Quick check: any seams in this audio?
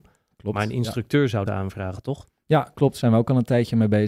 yes; 1 cut; at 1.5 s

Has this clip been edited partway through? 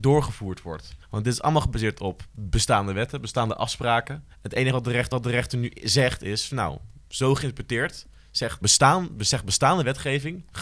yes; 4 cuts; at 1.0 s, 4.3 s, 5.1 s, 8.6 s

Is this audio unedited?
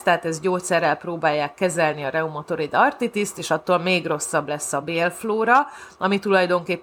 yes; 0 cuts

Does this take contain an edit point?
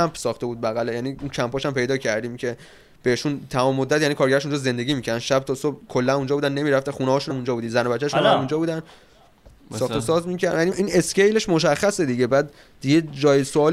yes; 2 cuts; at 7.3 s, 10.7 s

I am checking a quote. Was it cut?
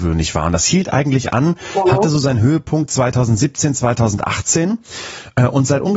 no; 0 cuts

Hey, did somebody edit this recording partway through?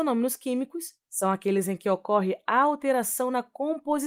no; 0 cuts

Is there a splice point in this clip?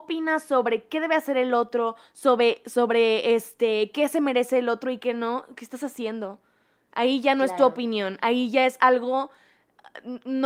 no; 0 cuts

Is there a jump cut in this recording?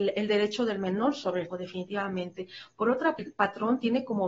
yes; 2 cuts; at 1.5 s, 3.2 s

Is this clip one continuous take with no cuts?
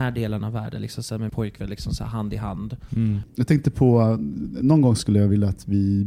no; 1 cut; at 1.3 s

